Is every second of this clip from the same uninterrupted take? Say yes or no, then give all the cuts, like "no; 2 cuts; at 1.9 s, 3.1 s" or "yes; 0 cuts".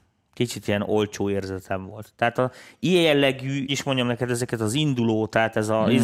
no; 1 cut; at 3.7 s